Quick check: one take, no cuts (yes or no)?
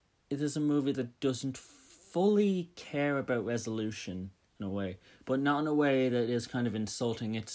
yes